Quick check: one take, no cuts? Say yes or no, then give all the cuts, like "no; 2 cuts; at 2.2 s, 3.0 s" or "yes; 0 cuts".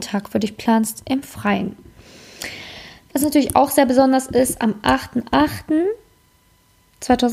yes; 0 cuts